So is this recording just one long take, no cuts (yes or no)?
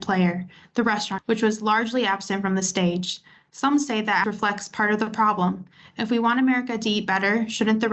no